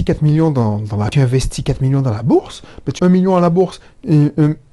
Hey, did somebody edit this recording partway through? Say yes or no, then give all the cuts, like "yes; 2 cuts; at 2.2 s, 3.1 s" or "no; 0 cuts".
yes; 2 cuts; at 1.1 s, 3.0 s